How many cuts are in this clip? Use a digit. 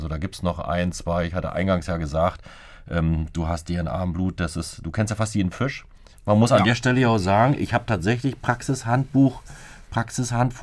0